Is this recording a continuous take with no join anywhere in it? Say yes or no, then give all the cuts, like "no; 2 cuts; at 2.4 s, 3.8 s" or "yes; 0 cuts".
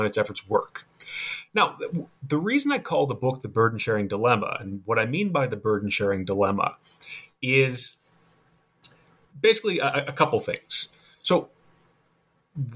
yes; 0 cuts